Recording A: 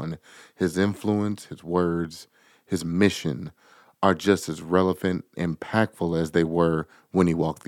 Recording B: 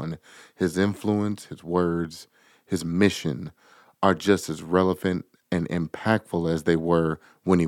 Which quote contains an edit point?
A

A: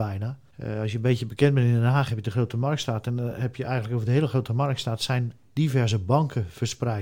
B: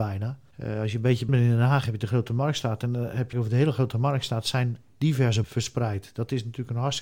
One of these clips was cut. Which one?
B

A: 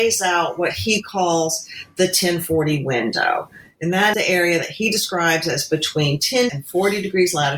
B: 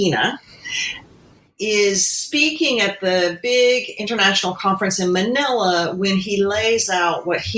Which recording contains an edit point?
A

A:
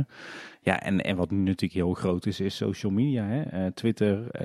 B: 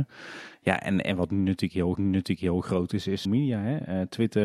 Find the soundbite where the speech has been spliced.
B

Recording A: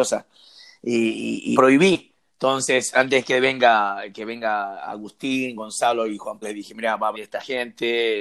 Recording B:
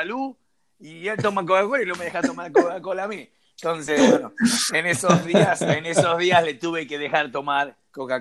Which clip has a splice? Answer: A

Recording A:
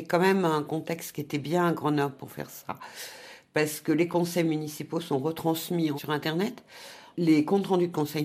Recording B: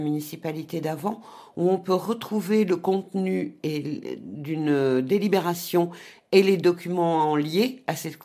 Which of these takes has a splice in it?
A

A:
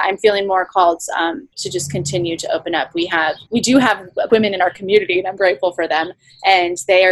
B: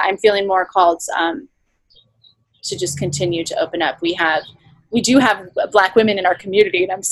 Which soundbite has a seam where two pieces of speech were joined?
A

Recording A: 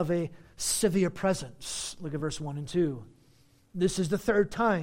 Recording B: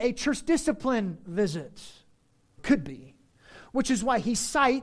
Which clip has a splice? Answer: B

